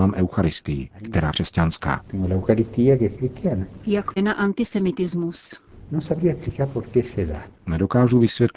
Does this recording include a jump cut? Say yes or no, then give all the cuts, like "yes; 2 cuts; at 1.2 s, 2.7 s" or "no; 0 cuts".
yes; 2 cuts; at 1.3 s, 4.2 s